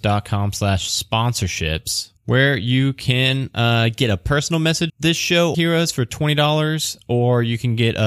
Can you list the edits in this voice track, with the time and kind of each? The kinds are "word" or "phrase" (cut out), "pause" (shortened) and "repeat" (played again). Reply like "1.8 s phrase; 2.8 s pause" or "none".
2.2 s pause; 4.9 s word; 5.5 s phrase